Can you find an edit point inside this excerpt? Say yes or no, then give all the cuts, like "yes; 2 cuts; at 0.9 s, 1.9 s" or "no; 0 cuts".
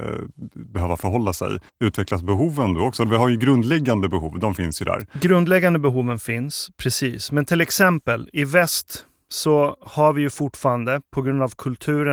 yes; 1 cut; at 1.7 s